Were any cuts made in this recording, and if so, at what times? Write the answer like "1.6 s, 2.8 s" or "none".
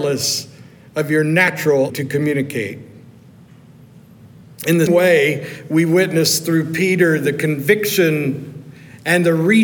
1.9 s, 4.9 s